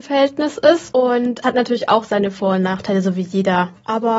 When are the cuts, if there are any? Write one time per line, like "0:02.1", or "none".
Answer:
0:01.4